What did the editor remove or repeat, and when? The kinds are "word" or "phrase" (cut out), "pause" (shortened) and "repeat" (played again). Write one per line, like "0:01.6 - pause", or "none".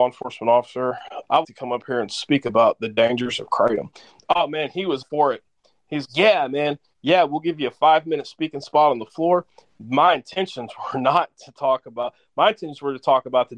0:01.4 - word
0:05.0 - word
0:06.0 - word